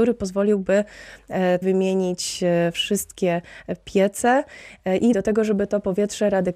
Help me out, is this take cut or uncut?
cut